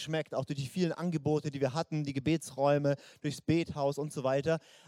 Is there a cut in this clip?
no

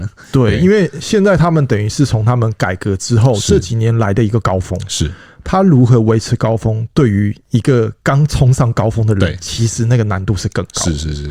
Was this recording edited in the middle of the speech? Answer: no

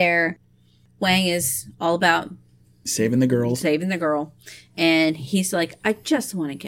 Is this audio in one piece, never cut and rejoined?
yes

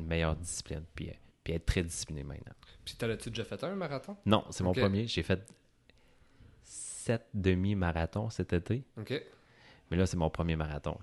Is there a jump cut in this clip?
yes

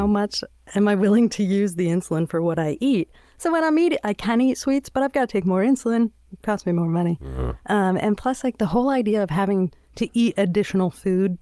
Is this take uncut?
yes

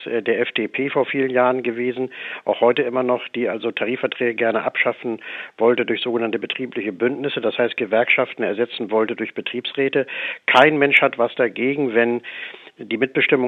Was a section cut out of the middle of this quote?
no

